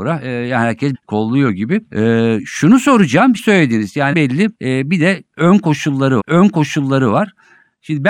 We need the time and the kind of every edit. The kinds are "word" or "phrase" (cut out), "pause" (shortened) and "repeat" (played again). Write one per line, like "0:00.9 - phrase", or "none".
0:00.9 - word
0:01.9 - pause
0:03.4 - phrase
0:04.1 - word
0:04.5 - pause
0:06.2 - repeat